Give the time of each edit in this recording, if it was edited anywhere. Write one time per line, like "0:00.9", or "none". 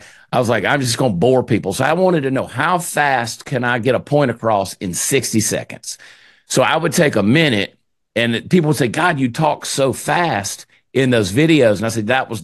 none